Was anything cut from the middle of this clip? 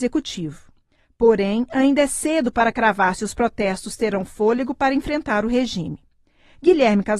no; 0 cuts

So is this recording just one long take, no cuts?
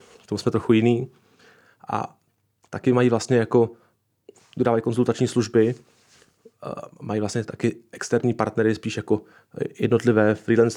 yes; 0 cuts

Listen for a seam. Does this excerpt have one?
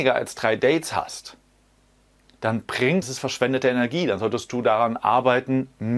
yes; 1 cut; at 3.0 s

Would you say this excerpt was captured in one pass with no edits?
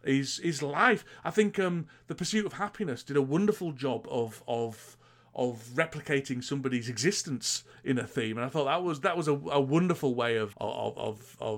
no; 1 cut; at 10.5 s

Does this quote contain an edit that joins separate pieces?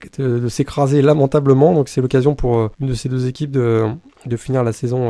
yes; 1 cut; at 2.7 s

